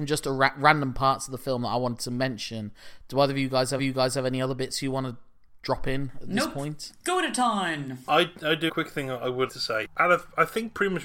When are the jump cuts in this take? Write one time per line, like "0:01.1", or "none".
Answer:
0:03.8
0:08.7
0:09.5